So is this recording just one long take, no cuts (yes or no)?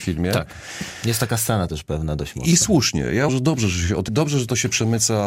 no